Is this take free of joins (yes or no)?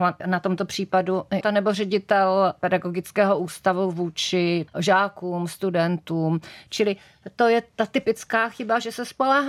no